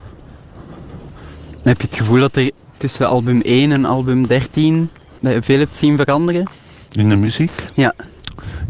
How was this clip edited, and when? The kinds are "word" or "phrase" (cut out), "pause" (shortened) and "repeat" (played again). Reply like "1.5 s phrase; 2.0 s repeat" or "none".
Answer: none